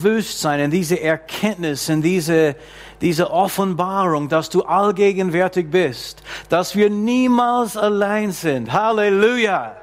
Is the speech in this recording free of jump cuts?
yes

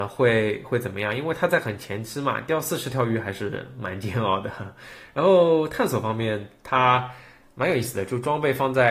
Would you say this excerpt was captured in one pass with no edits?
yes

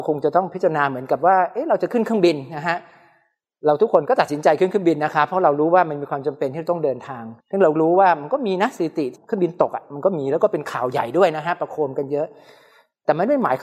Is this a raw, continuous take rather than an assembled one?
no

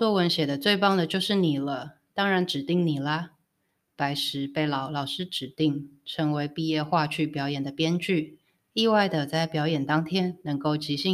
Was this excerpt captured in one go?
no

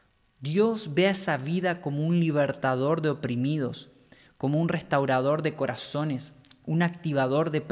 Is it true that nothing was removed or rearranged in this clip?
yes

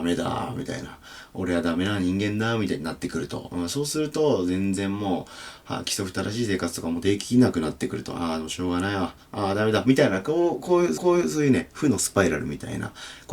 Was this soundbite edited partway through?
yes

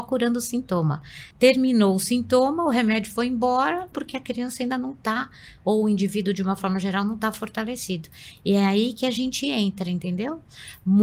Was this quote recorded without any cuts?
no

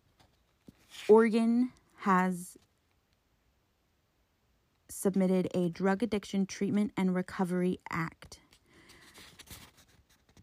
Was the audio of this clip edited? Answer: no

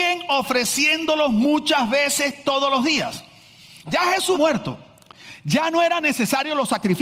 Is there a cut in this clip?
yes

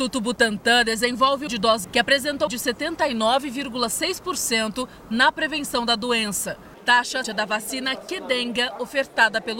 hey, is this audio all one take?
no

